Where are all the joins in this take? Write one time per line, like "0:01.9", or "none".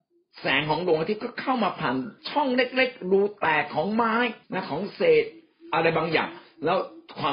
0:02.2
0:04.4

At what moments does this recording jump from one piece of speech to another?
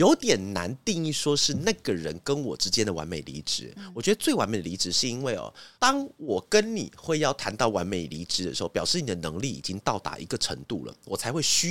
0:05.7

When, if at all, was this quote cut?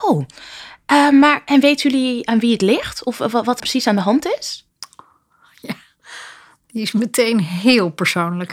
0:03.6

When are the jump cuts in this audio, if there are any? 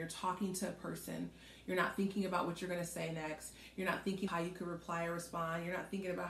0:04.3

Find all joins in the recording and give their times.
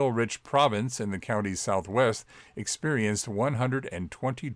none

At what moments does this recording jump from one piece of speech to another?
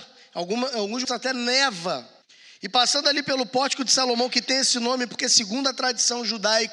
0:01.0
0:02.2

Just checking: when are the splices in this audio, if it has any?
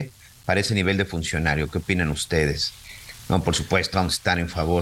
0:03.9

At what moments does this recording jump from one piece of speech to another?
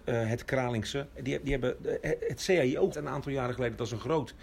0:02.2
0:02.9

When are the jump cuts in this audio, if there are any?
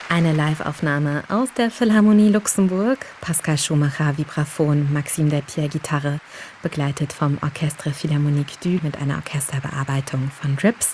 0:08.8

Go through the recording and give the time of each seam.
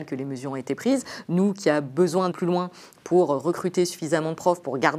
0:02.3

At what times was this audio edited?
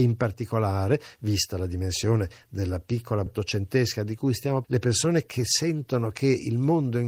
0:03.3
0:04.6

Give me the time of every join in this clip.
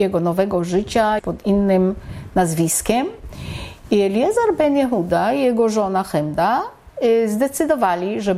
0:01.2

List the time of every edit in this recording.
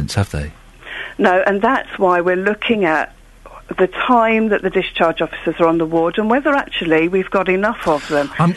none

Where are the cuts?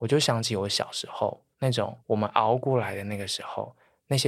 0:02.0

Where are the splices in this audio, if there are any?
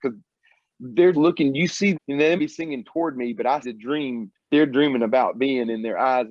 0:01.1
0:01.9
0:02.4
0:03.6
0:04.5

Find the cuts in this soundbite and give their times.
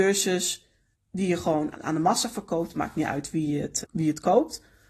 0:00.9
0:01.7
0:03.8

